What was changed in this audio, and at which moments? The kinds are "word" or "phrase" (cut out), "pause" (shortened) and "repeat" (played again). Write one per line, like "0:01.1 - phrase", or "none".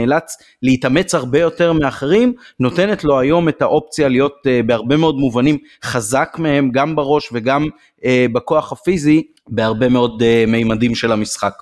none